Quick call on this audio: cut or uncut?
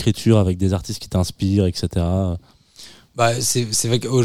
uncut